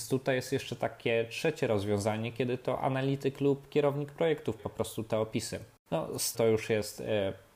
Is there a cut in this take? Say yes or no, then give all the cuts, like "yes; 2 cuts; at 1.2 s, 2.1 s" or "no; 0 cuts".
yes; 2 cuts; at 4.6 s, 6.3 s